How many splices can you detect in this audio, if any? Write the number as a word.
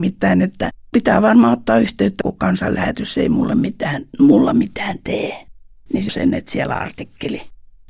three